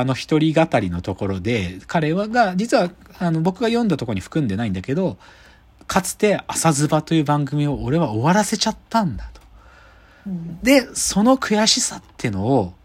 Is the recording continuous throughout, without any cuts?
yes; 0 cuts

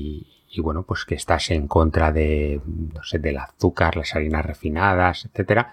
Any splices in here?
no; 0 cuts

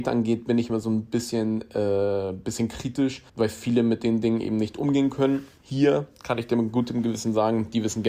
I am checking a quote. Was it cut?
yes; 1 cut; at 3.3 s

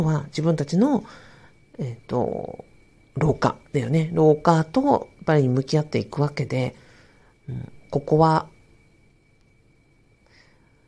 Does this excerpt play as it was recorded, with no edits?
no; 1 cut; at 3.1 s

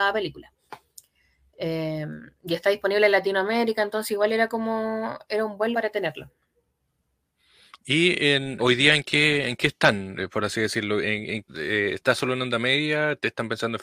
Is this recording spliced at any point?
yes; 3 cuts; at 5.7 s, 8.6 s, 11.5 s

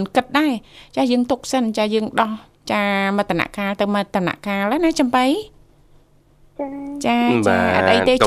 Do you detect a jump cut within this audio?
no; 0 cuts

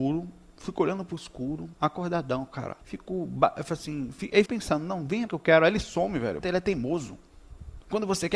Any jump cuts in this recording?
yes; 5 cuts; at 1.7 s, 2.8 s, 4.5 s, 5.3 s, 6.4 s

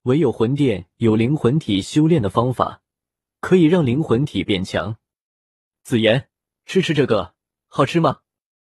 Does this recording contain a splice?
no; 0 cuts

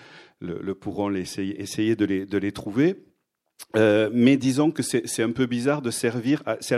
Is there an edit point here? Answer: no; 0 cuts

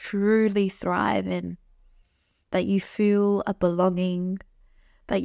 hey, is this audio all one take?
yes; 0 cuts

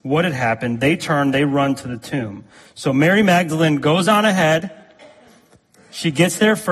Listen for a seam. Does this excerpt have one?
no; 0 cuts

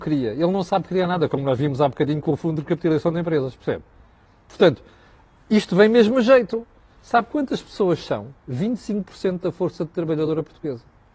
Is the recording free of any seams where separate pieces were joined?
yes; 0 cuts

